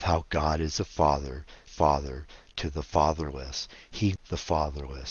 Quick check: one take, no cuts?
no; 2 cuts; at 1.7 s, 4.2 s

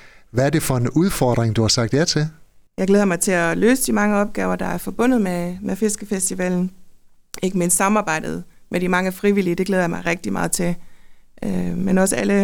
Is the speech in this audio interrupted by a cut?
no; 0 cuts

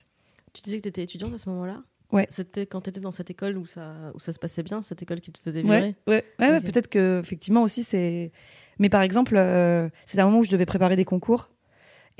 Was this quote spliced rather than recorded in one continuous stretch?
no; 0 cuts

